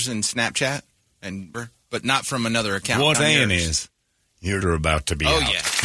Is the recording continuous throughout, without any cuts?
no; 3 cuts; at 1.5 s, 3.1 s, 4.6 s

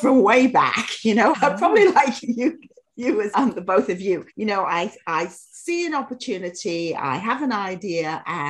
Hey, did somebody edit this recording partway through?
yes; 4 cuts; at 1.3 s, 2.2 s, 3.3 s, 4.3 s

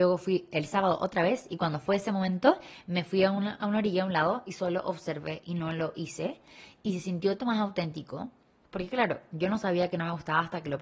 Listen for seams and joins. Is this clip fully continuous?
no; 1 cut; at 7.4 s

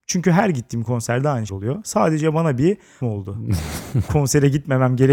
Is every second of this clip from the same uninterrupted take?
no; 3 cuts; at 1.5 s, 3.0 s, 4.1 s

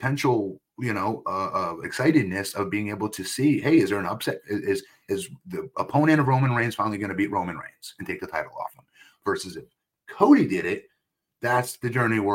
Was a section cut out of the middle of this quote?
no; 0 cuts

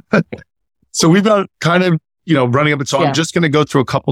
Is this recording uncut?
no; 2 cuts; at 1.5 s, 2.9 s

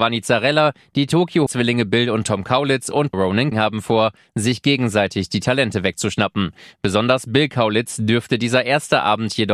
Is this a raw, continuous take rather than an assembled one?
no; 3 cuts; at 1.5 s, 3.1 s, 3.5 s

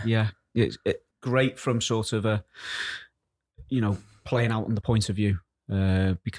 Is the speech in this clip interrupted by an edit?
yes; 2 cuts; at 1.1 s, 4.8 s

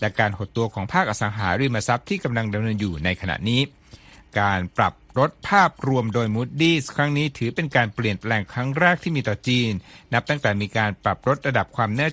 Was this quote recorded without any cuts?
yes; 0 cuts

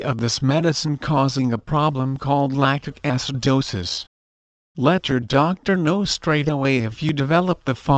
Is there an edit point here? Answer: no; 0 cuts

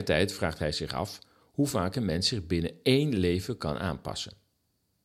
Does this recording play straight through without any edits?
yes; 0 cuts

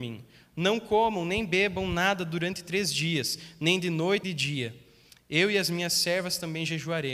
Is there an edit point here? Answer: yes; 1 cut; at 4.2 s

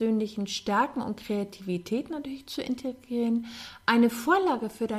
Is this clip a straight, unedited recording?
yes; 0 cuts

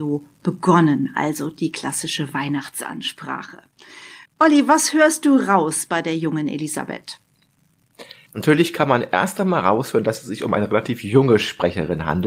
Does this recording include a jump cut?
yes; 2 cuts; at 4.3 s, 8.3 s

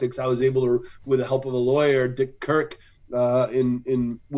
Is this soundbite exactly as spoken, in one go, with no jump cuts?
yes; 0 cuts

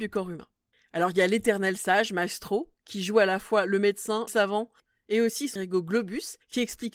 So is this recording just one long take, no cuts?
no; 2 cuts; at 4.3 s, 5.6 s

